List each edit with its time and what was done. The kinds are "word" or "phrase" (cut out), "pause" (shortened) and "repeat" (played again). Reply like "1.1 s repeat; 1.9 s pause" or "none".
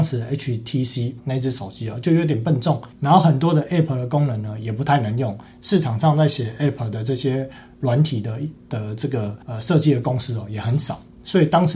1.2 s word; 2.9 s pause; 9.4 s pause